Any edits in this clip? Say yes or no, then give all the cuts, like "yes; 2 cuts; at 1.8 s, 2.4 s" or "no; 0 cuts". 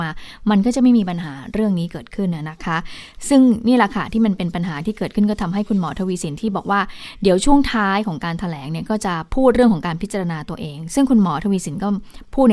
yes; 1 cut; at 9.3 s